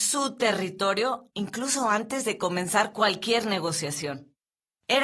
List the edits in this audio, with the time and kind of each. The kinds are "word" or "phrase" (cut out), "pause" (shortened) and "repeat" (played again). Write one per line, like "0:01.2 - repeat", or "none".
none